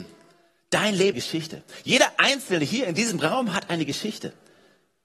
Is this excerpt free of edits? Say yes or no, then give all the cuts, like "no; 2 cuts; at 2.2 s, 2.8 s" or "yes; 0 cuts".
no; 1 cut; at 1.1 s